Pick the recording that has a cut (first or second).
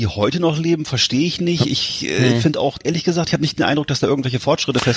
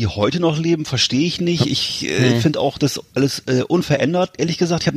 first